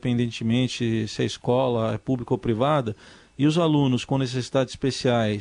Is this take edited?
no; 0 cuts

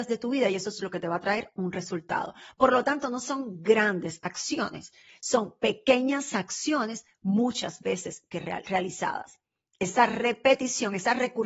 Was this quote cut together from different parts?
no; 0 cuts

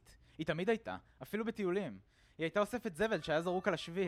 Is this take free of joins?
yes; 0 cuts

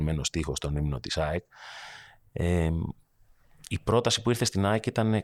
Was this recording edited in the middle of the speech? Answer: no; 0 cuts

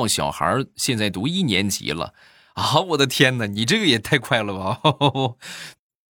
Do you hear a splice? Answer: no; 0 cuts

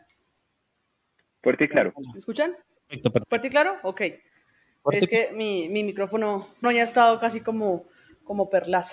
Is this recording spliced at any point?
yes; 1 cut; at 6.6 s

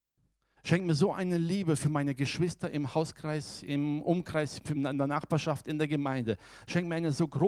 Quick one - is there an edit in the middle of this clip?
no; 0 cuts

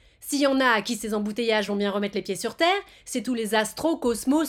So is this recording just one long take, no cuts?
yes; 0 cuts

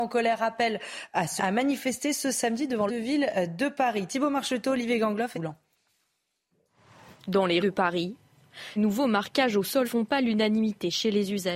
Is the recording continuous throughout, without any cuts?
no; 6 cuts; at 1.4 s, 2.9 s, 5.3 s, 7.6 s, 8.8 s, 9.8 s

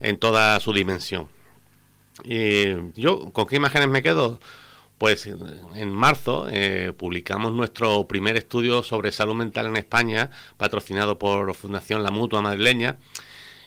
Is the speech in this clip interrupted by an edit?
yes; 1 cut; at 2.9 s

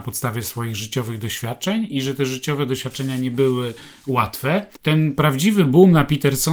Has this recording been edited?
no; 0 cuts

